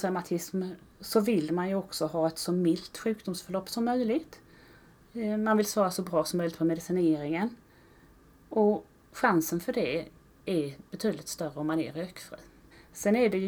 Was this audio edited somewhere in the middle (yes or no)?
no